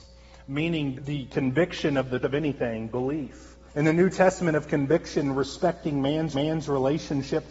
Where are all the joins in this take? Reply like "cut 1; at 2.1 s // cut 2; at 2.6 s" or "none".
cut 1; at 0.9 s // cut 2; at 2.2 s // cut 3; at 3.7 s // cut 4; at 6.3 s

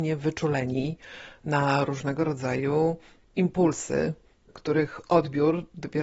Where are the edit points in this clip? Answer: none

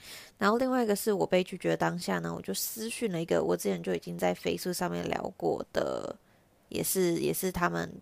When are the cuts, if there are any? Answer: none

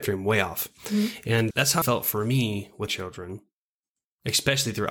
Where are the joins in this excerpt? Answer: cut 1; at 1.5 s // cut 2; at 1.8 s // cut 3; at 2.9 s

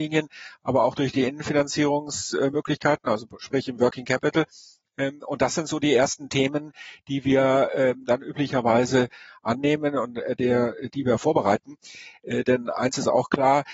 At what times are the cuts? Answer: none

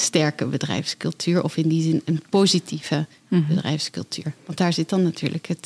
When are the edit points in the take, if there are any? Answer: none

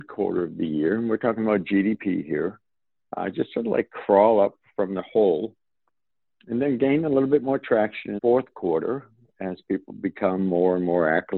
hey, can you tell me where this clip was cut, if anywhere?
cut 1; at 8.2 s

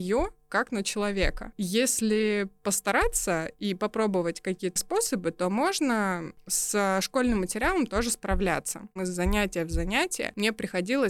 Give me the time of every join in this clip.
cut 1; at 4.8 s

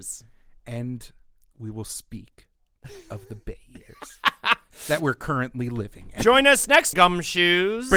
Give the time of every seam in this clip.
cut 1; at 6.9 s

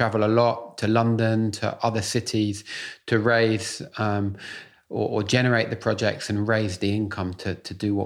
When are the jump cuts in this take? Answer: none

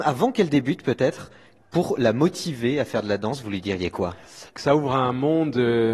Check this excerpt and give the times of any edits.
cut 1; at 4.5 s

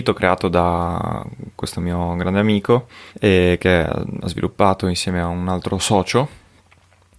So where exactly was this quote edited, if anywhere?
cut 1; at 3.1 s

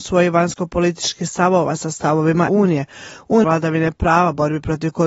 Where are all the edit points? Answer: cut 1; at 2.5 s // cut 2; at 3.4 s

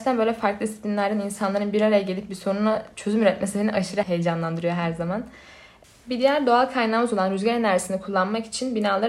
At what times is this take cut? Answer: none

